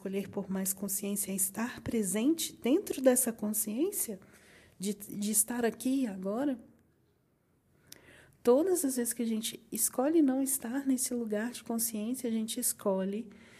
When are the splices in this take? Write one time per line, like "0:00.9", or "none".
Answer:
none